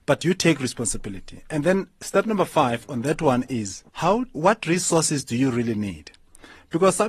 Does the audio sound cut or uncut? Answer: cut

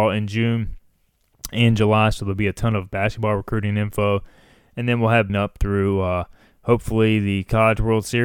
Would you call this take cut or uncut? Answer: cut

